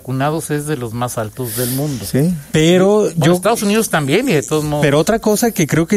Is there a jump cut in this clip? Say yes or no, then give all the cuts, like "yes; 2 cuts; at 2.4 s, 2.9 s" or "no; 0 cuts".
no; 0 cuts